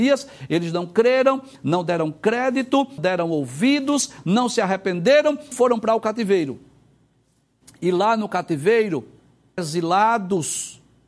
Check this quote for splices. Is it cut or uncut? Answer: cut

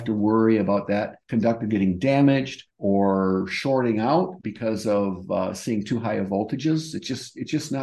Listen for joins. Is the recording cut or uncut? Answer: cut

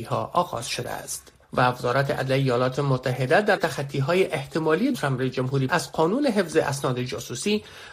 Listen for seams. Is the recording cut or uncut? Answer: cut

